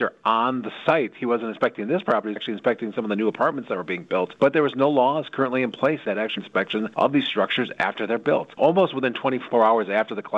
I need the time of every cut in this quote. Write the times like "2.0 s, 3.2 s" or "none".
2.4 s, 6.4 s